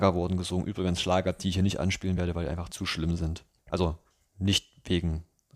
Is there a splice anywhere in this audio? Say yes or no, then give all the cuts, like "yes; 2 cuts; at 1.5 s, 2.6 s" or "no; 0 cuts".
no; 0 cuts